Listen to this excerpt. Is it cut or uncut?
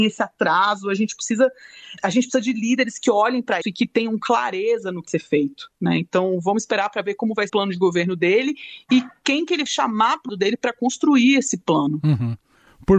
cut